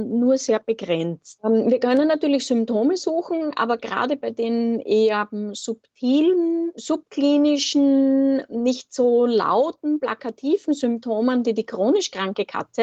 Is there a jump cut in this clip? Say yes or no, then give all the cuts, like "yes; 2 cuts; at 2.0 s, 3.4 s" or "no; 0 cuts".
no; 0 cuts